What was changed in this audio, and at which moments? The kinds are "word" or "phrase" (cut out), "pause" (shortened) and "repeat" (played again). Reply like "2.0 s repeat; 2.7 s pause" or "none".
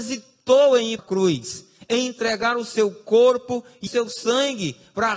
1.0 s word; 3.9 s word